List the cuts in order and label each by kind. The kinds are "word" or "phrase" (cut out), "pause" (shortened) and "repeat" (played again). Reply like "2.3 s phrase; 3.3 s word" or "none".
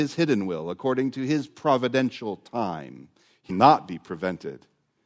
3.5 s word